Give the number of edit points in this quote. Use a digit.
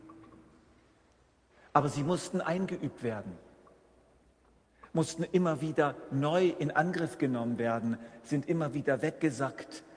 0